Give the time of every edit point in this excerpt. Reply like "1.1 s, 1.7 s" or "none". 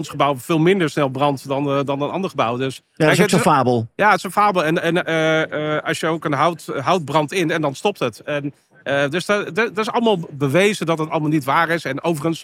none